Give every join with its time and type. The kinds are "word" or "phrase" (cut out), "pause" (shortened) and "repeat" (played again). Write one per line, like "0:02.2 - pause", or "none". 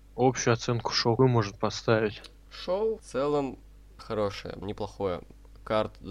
0:01.2 - word
0:03.0 - word
0:04.0 - word
0:04.6 - phrase